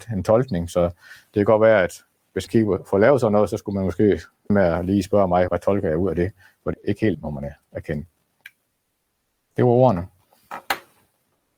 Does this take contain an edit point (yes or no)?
yes